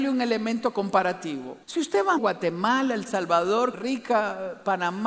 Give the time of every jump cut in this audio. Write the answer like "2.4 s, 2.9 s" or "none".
1.6 s, 2.2 s, 3.7 s